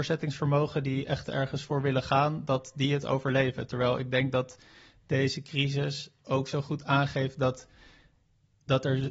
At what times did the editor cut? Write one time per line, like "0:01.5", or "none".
none